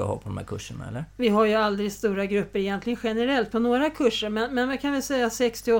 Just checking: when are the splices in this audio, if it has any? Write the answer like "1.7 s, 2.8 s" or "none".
none